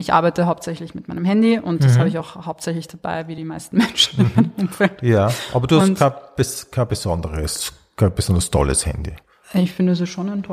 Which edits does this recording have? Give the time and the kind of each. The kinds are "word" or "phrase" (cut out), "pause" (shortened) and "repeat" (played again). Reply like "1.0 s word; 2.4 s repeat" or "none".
none